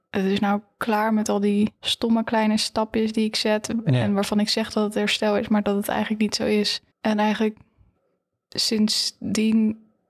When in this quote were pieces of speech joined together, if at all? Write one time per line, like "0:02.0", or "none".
0:01.8
0:06.9